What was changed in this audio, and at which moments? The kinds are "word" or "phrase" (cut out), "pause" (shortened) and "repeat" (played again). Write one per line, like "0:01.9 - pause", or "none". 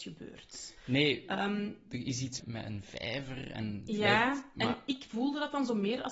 0:02.4 - word